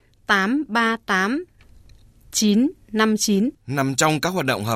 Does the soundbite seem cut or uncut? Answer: cut